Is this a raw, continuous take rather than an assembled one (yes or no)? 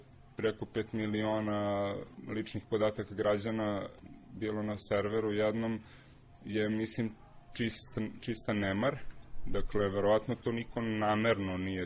yes